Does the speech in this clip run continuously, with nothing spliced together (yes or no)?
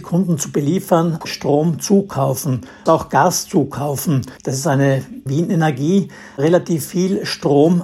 no